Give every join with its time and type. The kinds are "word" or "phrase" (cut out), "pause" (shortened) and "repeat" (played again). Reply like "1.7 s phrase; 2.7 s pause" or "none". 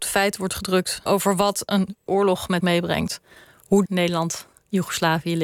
1.1 s word; 2.1 s word; 2.6 s word; 3.9 s word